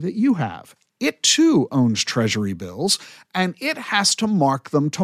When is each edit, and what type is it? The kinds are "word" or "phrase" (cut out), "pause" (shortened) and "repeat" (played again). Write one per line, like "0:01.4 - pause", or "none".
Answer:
none